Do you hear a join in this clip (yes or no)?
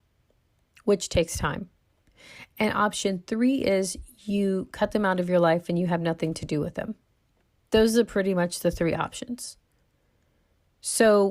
no